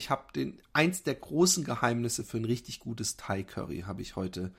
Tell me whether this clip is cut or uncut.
uncut